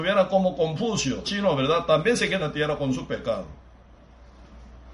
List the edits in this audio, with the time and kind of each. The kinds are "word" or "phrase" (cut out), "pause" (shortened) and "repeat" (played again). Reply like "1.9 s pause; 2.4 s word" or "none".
1.2 s word; 2.4 s word